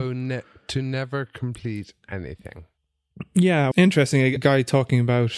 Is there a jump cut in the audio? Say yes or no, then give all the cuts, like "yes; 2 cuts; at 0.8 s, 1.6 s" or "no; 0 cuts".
yes; 2 cuts; at 3.7 s, 4.4 s